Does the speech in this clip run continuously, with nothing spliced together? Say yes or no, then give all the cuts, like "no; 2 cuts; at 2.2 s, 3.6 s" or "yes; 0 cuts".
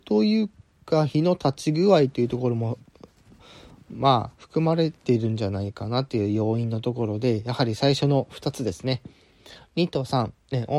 yes; 0 cuts